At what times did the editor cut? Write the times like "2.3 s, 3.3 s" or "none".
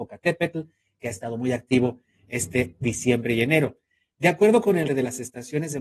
4.9 s